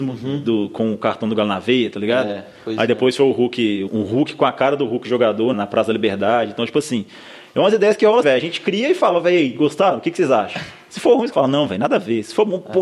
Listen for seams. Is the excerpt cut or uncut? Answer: cut